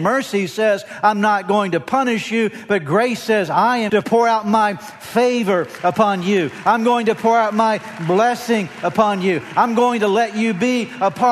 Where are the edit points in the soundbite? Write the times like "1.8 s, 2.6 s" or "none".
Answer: 3.9 s